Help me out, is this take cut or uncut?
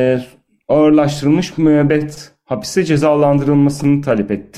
uncut